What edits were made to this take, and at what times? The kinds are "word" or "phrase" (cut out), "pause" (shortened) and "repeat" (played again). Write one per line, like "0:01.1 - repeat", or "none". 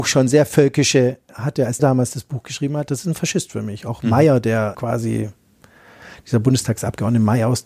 0:01.3 - word
0:01.8 - word
0:04.7 - word